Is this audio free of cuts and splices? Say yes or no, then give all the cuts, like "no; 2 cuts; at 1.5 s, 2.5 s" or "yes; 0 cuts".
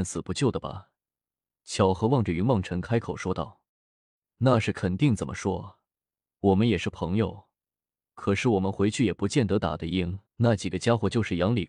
no; 2 cuts; at 3.7 s, 10.3 s